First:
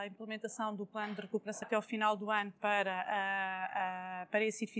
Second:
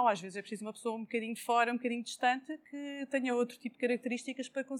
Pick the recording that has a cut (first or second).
first